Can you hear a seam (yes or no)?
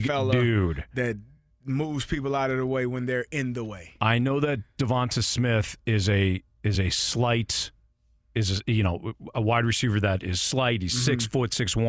no